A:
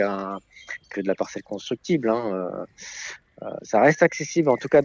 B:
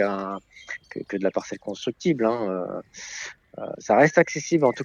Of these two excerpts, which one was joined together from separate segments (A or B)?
A